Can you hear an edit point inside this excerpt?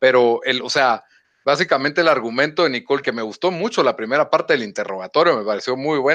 yes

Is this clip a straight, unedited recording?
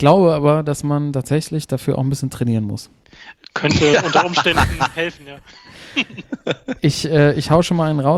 yes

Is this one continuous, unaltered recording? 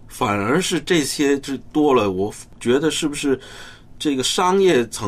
yes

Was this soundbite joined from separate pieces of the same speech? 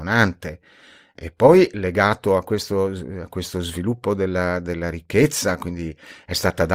no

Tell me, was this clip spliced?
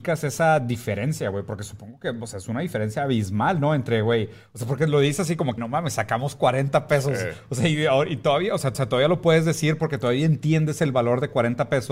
yes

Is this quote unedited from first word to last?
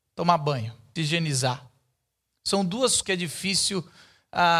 no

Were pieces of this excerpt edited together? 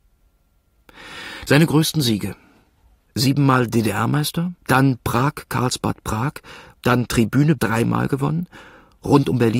yes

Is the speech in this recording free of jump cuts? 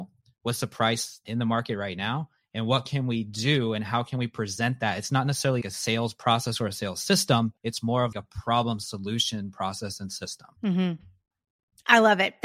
no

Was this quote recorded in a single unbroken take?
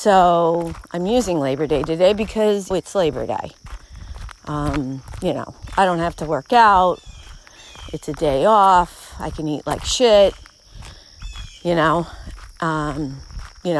no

